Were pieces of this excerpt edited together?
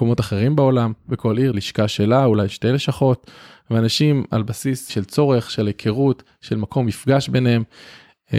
yes; 2 cuts; at 1.5 s, 4.9 s

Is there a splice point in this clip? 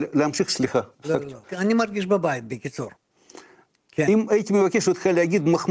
yes; 3 cuts; at 0.9 s, 1.4 s, 3.0 s

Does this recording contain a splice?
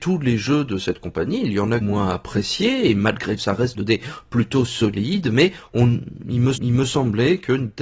yes; 4 cuts; at 1.8 s, 3.4 s, 3.7 s, 6.5 s

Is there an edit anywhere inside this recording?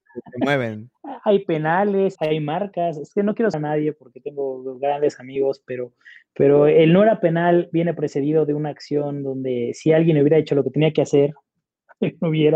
yes; 2 cuts; at 2.2 s, 3.5 s

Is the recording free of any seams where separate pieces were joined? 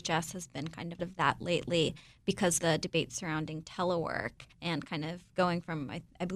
no; 3 cuts; at 1.0 s, 2.6 s, 4.5 s

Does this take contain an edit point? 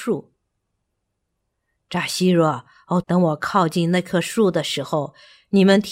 yes; 1 cut; at 3.0 s

